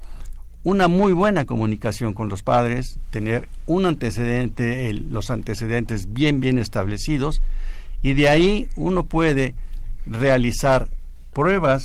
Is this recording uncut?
no; 1 cut; at 6.4 s

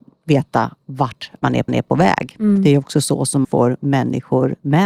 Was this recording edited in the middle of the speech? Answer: yes; 2 cuts; at 1.7 s, 3.4 s

